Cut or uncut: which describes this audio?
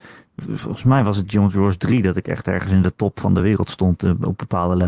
uncut